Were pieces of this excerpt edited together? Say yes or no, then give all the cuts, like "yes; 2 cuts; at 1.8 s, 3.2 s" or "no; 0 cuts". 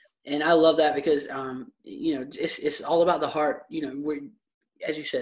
no; 0 cuts